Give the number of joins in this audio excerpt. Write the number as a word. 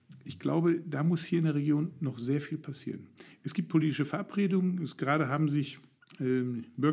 one